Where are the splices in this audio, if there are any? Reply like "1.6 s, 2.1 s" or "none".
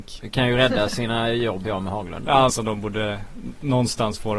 1.6 s, 2.5 s